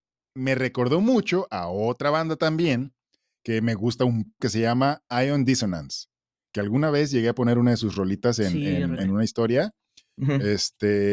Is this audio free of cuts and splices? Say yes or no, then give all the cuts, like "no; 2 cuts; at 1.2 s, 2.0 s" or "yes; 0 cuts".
no; 2 cuts; at 4.4 s, 9.0 s